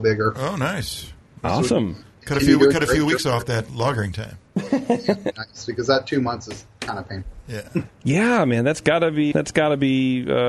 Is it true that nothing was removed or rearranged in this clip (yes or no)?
no